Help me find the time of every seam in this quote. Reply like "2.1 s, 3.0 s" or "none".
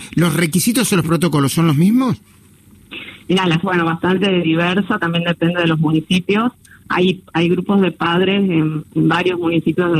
3.6 s